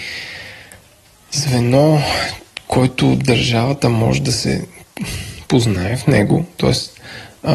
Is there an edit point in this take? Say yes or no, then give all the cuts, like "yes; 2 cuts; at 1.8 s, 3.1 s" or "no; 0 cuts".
no; 0 cuts